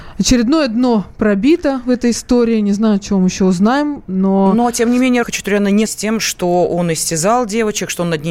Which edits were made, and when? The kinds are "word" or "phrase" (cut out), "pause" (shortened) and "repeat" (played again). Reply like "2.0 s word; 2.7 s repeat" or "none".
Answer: 5.2 s phrase; 5.9 s word